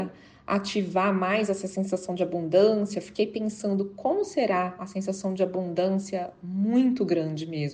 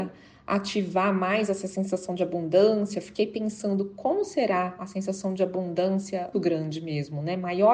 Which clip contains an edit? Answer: second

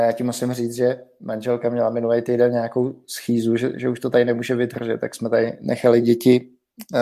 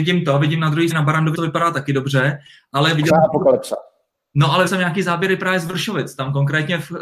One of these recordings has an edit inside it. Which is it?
second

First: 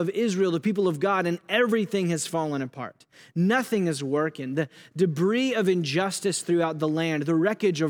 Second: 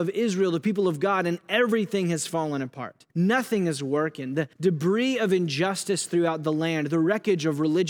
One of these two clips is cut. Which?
second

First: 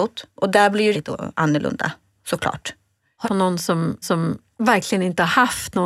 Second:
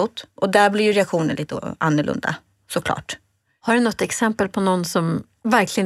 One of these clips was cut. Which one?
first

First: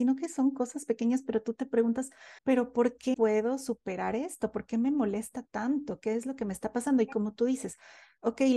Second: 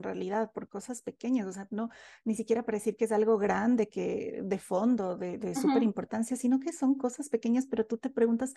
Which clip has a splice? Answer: first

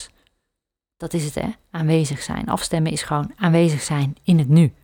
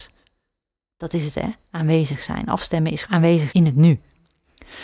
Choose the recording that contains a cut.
second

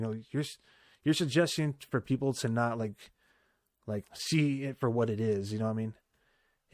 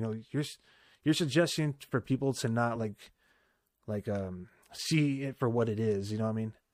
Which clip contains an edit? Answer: first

